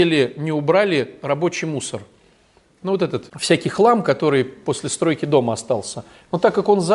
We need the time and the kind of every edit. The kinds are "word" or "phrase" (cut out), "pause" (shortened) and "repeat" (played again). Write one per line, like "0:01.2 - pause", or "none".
none